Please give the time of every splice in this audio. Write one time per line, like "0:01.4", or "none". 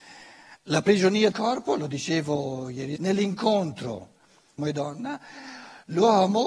0:01.3
0:03.0
0:04.6